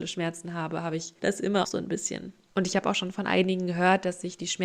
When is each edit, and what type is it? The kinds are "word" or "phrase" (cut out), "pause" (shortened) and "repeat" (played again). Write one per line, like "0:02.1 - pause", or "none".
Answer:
0:01.6 - word